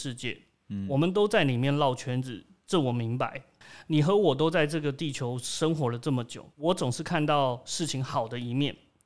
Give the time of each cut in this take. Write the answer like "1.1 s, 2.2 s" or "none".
6.5 s